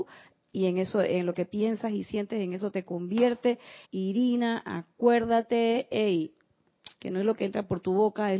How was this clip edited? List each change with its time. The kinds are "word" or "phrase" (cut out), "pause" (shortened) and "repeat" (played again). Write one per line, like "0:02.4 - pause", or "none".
0:03.8 - pause
0:07.0 - pause